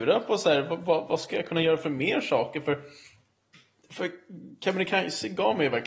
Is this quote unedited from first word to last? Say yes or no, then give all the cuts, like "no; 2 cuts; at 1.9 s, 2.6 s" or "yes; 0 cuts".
yes; 0 cuts